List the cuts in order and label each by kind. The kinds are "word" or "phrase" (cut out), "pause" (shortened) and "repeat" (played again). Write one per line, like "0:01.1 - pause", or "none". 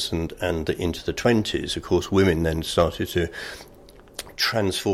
none